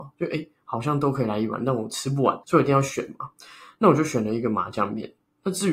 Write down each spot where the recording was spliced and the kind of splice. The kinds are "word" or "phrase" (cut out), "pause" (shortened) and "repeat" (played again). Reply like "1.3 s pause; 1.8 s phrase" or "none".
2.4 s pause